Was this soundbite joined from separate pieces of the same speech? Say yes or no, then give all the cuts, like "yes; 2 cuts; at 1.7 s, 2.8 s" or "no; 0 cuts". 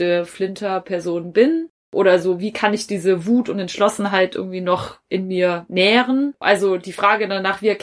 no; 0 cuts